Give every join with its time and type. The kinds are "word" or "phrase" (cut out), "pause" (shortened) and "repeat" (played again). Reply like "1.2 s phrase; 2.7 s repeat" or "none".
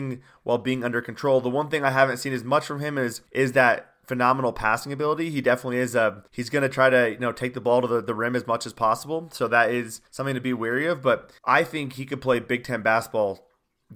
3.3 s pause; 6.3 s pause; 10.1 s pause; 11.4 s pause